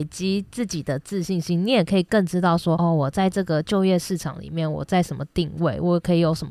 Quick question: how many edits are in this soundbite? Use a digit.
0